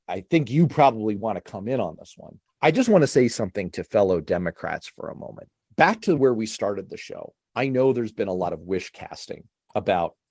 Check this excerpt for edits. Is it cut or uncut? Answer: uncut